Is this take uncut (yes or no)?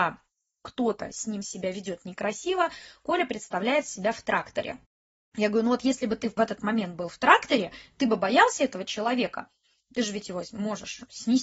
yes